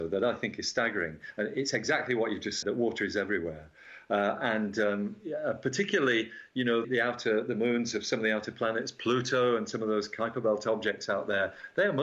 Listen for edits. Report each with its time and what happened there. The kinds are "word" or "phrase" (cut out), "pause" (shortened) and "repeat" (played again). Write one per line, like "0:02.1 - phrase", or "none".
0:02.6 - word
0:06.8 - word